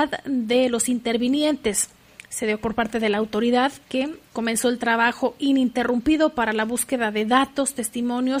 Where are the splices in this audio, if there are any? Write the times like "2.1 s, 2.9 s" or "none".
2.6 s, 4.2 s